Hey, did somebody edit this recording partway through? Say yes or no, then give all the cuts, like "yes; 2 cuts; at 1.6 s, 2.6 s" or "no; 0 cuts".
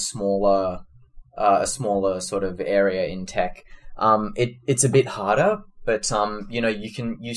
no; 0 cuts